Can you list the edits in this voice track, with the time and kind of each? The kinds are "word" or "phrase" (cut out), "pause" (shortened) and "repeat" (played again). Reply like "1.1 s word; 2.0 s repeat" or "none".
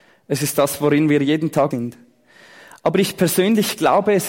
1.7 s word